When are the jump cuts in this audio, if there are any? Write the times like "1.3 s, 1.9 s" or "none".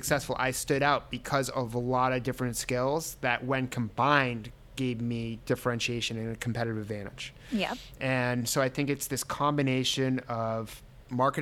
none